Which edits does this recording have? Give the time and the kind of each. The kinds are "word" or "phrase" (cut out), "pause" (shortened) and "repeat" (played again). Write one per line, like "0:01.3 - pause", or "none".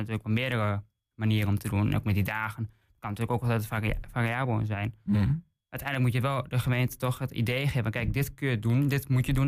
none

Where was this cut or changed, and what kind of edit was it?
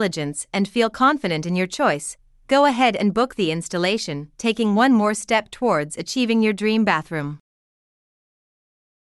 none

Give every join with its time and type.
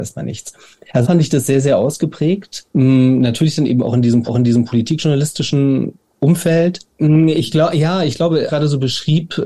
0:01.0 - word
0:02.7 - pause
0:04.3 - repeat
0:06.9 - pause
0:08.5 - phrase

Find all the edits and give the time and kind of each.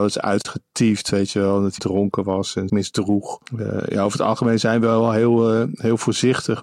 0:01.8 - phrase
0:02.7 - word
0:03.5 - pause

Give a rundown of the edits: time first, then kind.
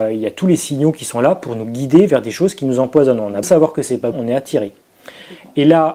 0:03.4 - word
0:04.1 - word

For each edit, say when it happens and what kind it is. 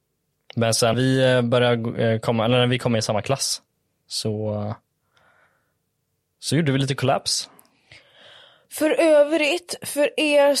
0:00.9 - word

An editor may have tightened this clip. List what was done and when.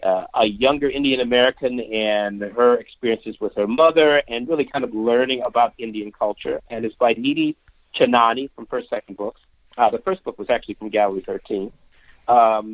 none

